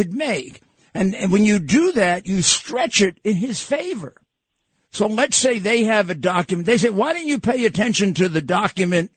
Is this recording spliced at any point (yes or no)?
no